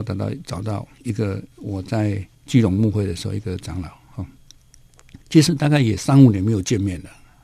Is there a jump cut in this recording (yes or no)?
yes